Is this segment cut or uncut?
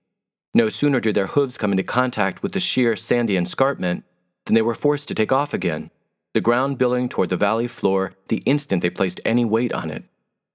uncut